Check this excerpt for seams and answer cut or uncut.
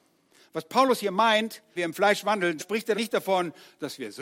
cut